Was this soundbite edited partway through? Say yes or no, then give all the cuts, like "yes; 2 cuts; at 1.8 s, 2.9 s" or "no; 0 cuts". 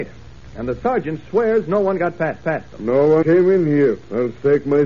yes; 2 cuts; at 2.4 s, 3.2 s